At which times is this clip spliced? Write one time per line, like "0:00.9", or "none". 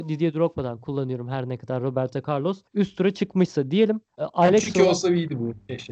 0:02.7
0:04.1